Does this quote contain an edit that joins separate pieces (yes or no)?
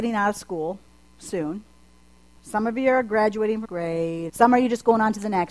yes